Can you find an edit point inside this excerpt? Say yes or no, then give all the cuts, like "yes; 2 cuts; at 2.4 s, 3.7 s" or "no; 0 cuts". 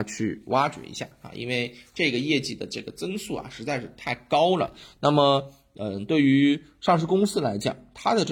no; 0 cuts